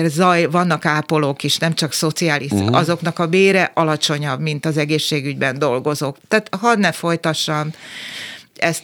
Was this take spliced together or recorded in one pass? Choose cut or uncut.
uncut